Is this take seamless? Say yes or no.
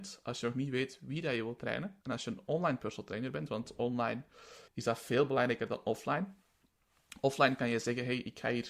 no